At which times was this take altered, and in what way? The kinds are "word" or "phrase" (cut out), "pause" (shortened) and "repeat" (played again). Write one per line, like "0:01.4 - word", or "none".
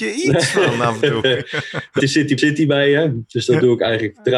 0:02.0 - word
0:02.4 - word